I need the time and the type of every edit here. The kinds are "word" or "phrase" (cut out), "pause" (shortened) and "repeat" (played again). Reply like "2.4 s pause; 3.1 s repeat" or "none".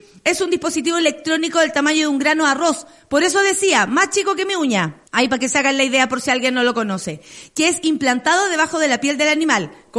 5.1 s pause